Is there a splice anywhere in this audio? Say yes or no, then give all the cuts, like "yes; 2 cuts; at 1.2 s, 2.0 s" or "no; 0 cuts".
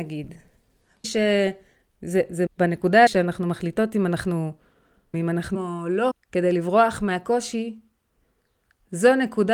yes; 6 cuts; at 1.0 s, 2.5 s, 3.1 s, 5.1 s, 5.5 s, 6.1 s